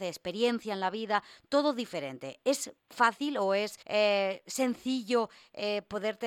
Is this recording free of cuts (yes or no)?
no